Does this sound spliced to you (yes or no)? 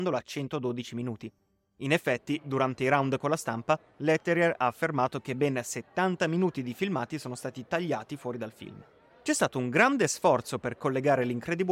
no